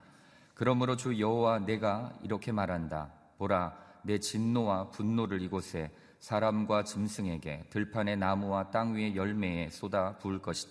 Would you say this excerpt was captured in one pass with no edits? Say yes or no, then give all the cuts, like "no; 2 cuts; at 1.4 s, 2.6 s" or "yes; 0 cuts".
yes; 0 cuts